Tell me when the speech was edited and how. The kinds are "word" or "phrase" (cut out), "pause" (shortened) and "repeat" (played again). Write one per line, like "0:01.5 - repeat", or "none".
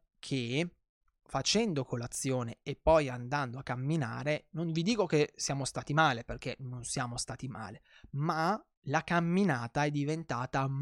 none